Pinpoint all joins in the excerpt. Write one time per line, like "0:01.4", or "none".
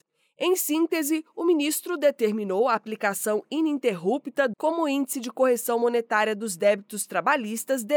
0:04.5